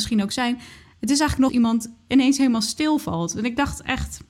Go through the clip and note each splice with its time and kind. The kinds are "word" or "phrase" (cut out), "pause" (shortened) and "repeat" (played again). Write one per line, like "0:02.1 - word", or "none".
0:01.5 - phrase